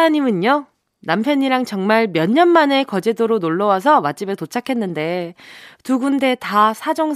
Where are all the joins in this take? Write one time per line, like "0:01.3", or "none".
none